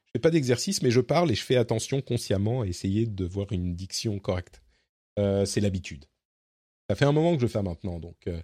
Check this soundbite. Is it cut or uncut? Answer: cut